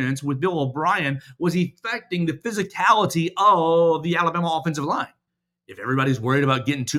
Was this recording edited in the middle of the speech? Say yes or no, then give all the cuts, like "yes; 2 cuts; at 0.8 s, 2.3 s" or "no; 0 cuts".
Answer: yes; 1 cut; at 5.3 s